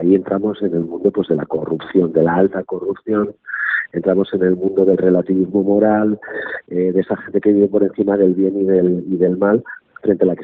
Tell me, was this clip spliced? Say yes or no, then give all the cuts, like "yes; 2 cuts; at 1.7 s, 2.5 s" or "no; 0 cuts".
no; 0 cuts